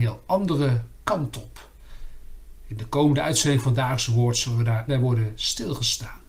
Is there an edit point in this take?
yes; 1 cut; at 4.9 s

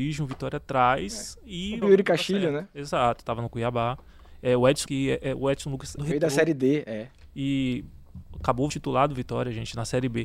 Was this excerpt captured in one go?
no; 4 cuts; at 1.8 s, 4.9 s, 6.0 s, 8.7 s

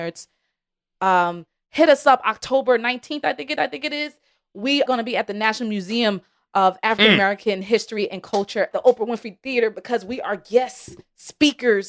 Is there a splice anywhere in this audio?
yes; 3 cuts; at 3.6 s, 4.9 s, 8.7 s

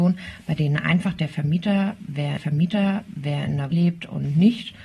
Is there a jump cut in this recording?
yes; 2 cuts; at 2.4 s, 3.7 s

